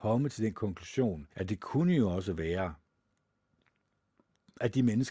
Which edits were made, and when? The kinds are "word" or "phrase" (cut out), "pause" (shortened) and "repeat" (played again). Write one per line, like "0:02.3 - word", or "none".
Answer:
0:01.3 - pause